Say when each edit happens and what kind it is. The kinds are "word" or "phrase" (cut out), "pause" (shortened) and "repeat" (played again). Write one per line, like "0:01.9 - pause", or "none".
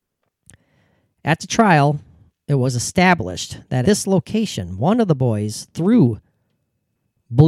0:03.8 - word